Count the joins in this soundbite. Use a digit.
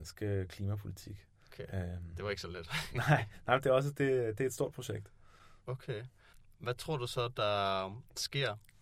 1